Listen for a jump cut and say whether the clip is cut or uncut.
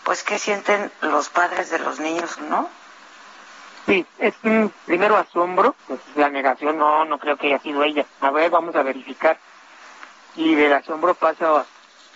cut